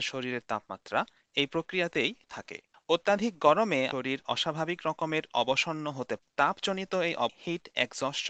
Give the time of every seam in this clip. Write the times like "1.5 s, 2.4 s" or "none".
2.3 s, 3.9 s, 6.2 s, 7.3 s